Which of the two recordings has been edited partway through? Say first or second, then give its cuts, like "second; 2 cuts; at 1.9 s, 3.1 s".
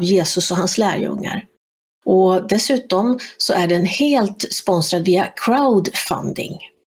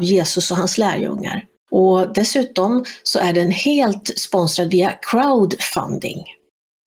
second; 1 cut; at 1.6 s